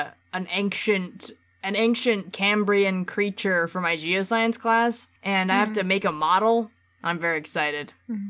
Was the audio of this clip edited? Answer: yes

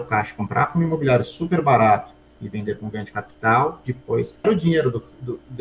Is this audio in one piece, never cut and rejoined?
no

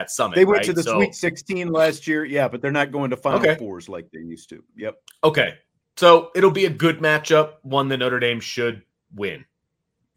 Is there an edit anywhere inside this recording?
no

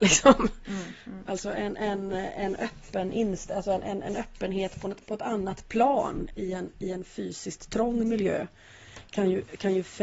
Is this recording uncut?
yes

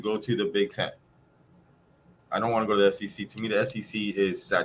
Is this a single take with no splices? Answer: yes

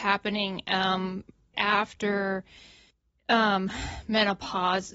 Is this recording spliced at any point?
yes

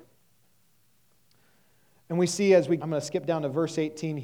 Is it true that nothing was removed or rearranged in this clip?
no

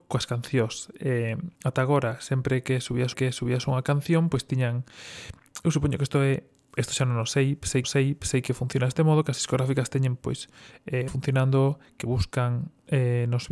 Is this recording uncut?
no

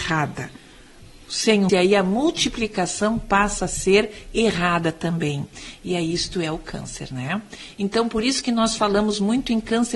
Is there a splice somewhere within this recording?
yes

